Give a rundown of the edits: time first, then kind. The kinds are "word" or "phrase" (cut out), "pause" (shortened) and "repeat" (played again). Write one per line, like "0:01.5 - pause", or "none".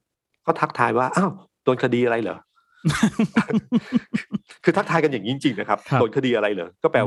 none